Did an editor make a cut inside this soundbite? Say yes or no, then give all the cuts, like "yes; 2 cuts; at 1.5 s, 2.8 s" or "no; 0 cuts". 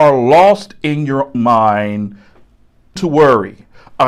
yes; 2 cuts; at 1.3 s, 3.0 s